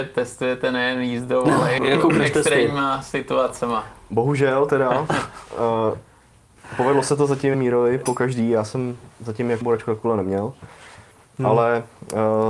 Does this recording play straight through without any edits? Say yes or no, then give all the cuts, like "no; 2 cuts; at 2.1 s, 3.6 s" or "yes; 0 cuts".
no; 3 cuts; at 1.8 s, 7.5 s, 9.6 s